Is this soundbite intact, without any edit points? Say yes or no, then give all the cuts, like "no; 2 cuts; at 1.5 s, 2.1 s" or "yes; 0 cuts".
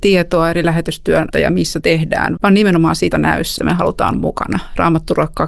no; 6 cuts; at 1.3 s, 1.8 s, 2.4 s, 3.1 s, 3.6 s, 4.1 s